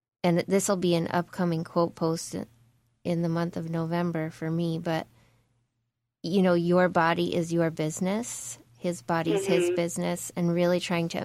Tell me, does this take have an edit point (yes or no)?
no